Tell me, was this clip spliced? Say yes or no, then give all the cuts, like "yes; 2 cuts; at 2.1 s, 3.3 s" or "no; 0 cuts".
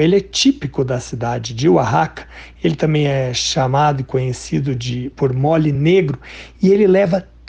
no; 0 cuts